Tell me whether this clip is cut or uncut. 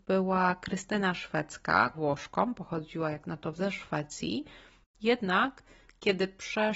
cut